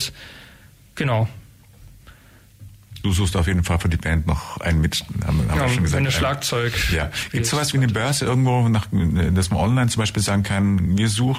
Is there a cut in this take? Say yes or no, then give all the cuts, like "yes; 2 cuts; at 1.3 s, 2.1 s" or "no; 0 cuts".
yes; 1 cut; at 3.0 s